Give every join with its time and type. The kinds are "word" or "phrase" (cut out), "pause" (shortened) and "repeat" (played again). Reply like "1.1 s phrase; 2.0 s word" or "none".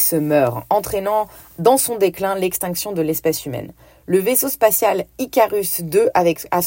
none

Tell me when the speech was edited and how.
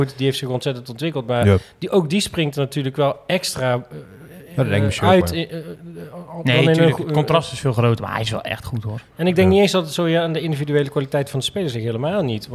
none

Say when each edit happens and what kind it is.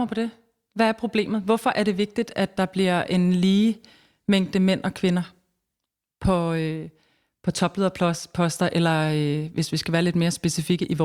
none

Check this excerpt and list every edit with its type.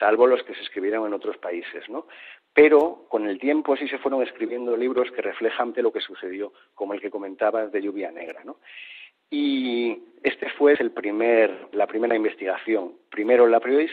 5.7 s word; 10.7 s word; 11.7 s word

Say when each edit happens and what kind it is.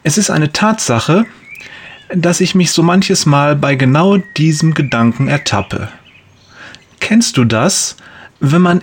2.7 s word

